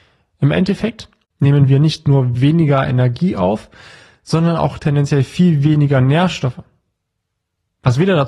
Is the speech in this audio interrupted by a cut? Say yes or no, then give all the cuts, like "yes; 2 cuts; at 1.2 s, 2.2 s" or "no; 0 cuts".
no; 0 cuts